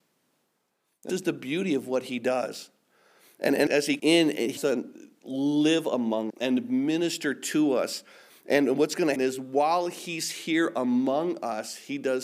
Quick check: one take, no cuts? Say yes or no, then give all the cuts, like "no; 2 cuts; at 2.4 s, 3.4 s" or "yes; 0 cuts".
no; 6 cuts; at 1.1 s, 3.7 s, 4.0 s, 4.6 s, 6.3 s, 9.2 s